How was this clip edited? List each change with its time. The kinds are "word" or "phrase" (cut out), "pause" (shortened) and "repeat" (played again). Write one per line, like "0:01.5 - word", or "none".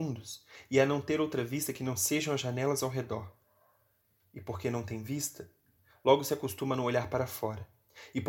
none